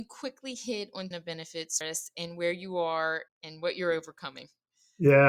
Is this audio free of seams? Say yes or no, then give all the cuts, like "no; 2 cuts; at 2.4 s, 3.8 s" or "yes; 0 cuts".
no; 3 cuts; at 1.1 s, 1.8 s, 3.3 s